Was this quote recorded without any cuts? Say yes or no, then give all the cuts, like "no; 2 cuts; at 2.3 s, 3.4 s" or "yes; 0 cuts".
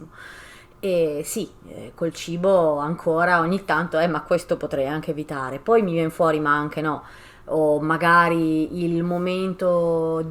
yes; 0 cuts